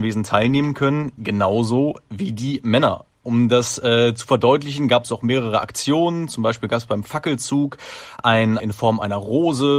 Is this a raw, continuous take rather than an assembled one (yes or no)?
no